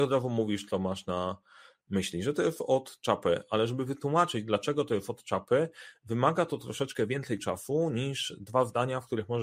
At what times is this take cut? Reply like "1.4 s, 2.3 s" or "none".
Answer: none